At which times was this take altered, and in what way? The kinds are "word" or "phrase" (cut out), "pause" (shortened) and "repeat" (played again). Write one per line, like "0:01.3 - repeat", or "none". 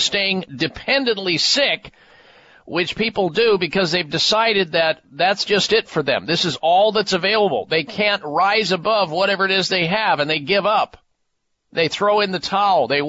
none